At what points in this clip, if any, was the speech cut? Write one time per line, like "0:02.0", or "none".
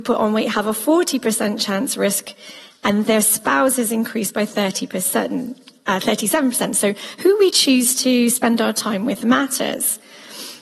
none